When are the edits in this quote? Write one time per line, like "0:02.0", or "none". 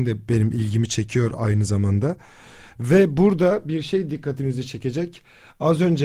none